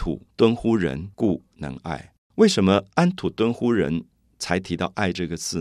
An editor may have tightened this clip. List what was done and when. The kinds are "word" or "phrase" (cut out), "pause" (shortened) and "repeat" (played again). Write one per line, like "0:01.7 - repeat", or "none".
0:01.1 - pause
0:04.1 - pause